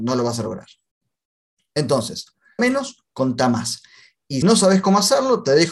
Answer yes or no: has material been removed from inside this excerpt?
yes